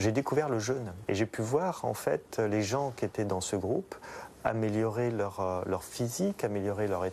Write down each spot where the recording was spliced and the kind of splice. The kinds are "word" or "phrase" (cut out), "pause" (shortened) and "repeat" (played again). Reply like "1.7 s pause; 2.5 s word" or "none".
none